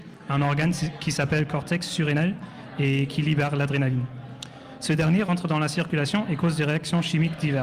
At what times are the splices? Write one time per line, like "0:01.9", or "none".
none